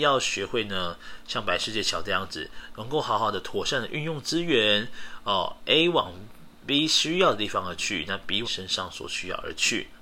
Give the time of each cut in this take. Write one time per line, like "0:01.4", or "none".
0:08.4